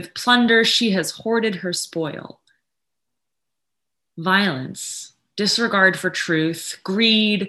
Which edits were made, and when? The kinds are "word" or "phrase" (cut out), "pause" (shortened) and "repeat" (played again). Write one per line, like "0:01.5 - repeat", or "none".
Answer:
none